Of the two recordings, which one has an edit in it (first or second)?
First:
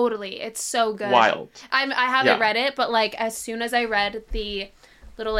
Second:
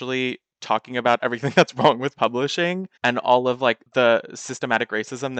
second